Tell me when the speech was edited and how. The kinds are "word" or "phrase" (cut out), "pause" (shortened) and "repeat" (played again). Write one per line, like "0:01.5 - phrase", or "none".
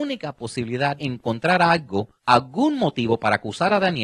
0:01.0 - word
0:02.2 - pause